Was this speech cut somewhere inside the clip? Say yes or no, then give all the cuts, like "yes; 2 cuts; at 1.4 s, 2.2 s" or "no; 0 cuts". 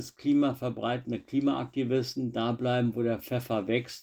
no; 0 cuts